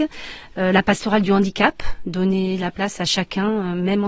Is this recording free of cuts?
yes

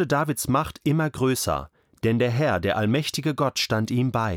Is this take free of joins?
yes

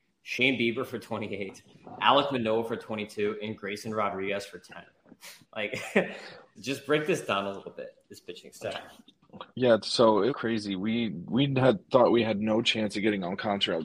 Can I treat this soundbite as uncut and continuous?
no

